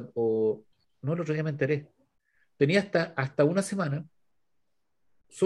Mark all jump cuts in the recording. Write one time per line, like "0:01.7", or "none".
none